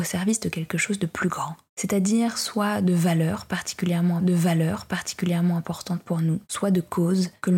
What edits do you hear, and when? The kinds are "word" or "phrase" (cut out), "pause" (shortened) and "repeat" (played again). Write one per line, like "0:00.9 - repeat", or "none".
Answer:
0:01.7 - pause
0:04.2 - repeat
0:06.4 - pause